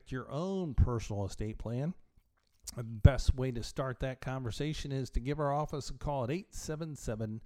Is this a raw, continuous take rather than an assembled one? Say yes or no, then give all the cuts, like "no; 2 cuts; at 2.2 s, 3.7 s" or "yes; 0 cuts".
yes; 0 cuts